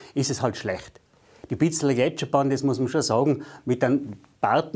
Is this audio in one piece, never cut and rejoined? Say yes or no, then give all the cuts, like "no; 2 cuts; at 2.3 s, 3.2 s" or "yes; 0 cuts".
yes; 0 cuts